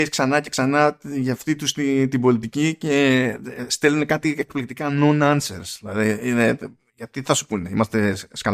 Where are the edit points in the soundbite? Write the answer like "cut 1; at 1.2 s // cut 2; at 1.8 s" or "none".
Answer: none